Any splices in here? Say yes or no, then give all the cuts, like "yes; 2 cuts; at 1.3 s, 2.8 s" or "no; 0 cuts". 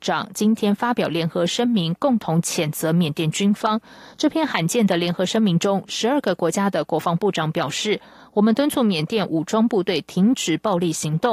no; 0 cuts